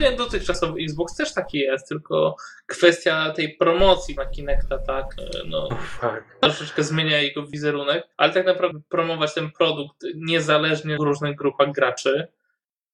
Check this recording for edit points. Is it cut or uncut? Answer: cut